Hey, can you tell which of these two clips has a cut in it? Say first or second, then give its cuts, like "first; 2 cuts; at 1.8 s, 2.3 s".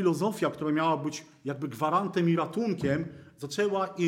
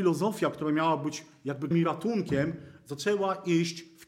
second; 1 cut; at 1.7 s